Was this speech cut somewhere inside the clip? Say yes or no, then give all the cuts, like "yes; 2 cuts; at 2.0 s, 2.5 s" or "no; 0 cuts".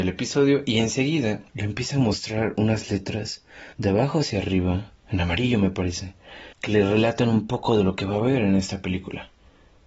yes; 3 cuts; at 1.5 s, 3.7 s, 6.5 s